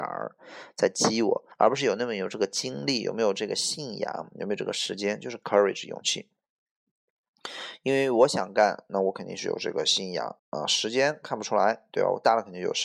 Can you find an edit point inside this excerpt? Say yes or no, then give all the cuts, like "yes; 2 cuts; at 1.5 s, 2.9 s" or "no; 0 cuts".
yes; 2 cuts; at 1.5 s, 10.4 s